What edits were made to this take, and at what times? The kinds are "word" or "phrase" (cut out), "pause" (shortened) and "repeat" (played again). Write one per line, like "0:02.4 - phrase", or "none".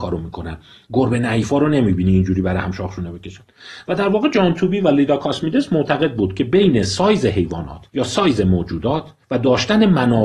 0:07.9 - pause
0:09.2 - pause